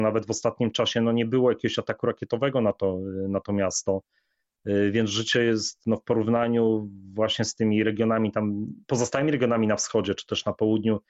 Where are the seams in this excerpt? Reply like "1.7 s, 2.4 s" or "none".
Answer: 8.8 s